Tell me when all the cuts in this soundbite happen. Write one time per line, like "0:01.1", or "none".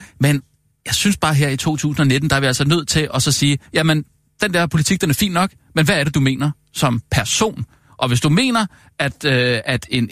none